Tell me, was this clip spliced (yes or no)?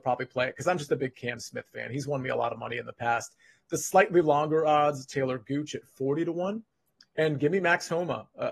no